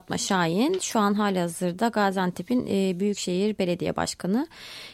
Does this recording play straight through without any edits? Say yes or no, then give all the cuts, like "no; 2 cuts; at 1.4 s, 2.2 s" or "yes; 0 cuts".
yes; 0 cuts